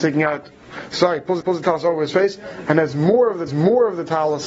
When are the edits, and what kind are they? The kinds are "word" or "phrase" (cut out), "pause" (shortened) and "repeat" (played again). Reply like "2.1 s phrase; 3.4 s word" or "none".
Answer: 1.4 s repeat; 3.5 s repeat